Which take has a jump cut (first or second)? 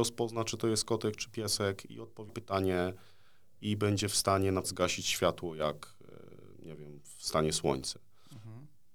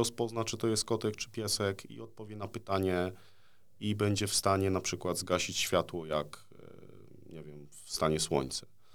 first